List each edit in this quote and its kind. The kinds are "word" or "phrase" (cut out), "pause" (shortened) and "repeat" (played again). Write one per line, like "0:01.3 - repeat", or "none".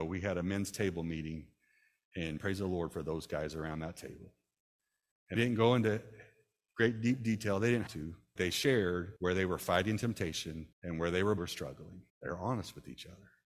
0:02.4 - word
0:05.4 - word
0:07.9 - word
0:08.4 - word
0:09.2 - pause
0:10.7 - pause
0:11.4 - phrase
0:12.1 - pause